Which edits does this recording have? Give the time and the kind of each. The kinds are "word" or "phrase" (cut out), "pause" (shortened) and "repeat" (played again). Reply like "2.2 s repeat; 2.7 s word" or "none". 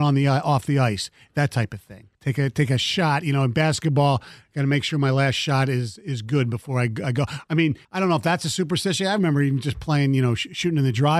2.1 s pause; 7.8 s pause